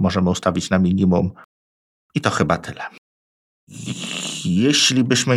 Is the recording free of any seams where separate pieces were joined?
yes; 0 cuts

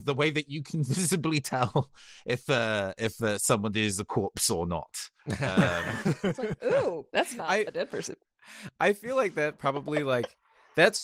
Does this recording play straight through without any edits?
no; 2 cuts; at 5.2 s, 7.1 s

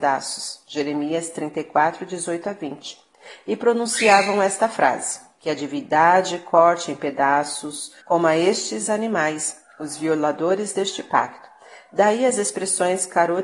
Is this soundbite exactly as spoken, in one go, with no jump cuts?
no; 1 cut; at 8.0 s

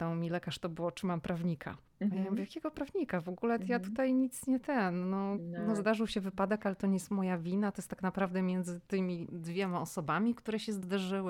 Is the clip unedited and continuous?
no; 1 cut; at 1.9 s

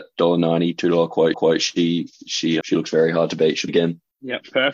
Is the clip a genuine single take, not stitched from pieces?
no; 3 cuts; at 1.3 s, 2.6 s, 3.7 s

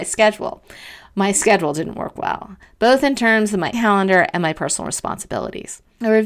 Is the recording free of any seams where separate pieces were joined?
no; 1 cut; at 3.7 s

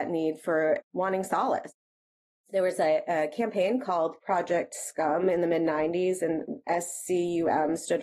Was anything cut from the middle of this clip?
no; 0 cuts

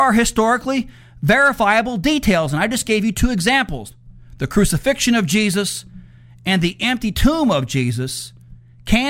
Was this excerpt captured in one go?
yes; 0 cuts

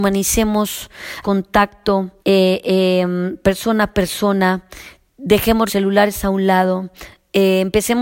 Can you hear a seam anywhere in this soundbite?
yes; 3 cuts; at 1.2 s, 2.2 s, 5.7 s

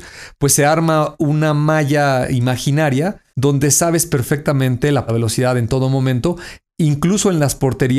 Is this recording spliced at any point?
yes; 2 cuts; at 3.3 s, 5.1 s

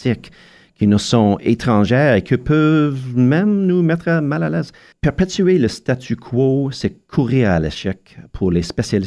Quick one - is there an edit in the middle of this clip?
no; 0 cuts

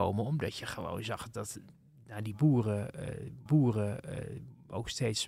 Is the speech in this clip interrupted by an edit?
yes; 1 cut; at 3.5 s

